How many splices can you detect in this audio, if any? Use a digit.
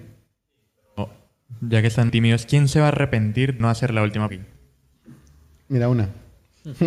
3